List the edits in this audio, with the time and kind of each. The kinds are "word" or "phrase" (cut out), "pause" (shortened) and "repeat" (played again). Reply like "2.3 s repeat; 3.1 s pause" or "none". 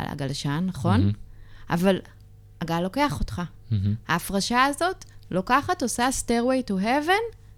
none